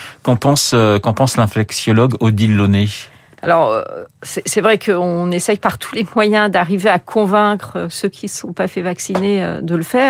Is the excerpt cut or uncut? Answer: uncut